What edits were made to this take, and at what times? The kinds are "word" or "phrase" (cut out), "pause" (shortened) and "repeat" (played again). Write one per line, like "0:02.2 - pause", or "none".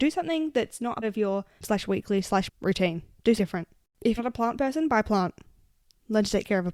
0:01.0 - word
0:01.6 - word
0:02.5 - word
0:03.4 - word
0:04.2 - word